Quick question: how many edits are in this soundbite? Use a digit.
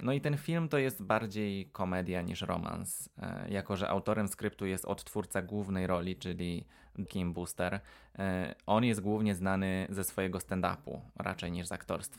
1